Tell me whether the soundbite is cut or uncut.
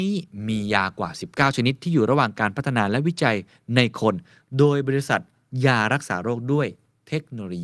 uncut